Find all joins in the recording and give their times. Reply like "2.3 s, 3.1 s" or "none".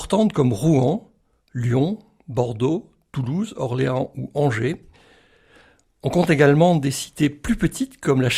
none